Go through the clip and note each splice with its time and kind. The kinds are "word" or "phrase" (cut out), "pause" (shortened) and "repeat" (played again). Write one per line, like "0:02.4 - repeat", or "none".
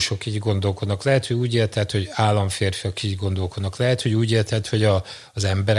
none